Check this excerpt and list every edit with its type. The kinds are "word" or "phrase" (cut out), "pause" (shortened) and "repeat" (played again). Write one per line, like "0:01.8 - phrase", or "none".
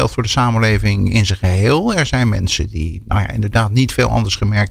none